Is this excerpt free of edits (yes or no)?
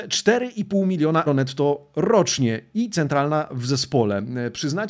no